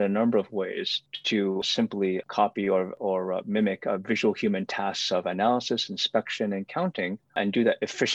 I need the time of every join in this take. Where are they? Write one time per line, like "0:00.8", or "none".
none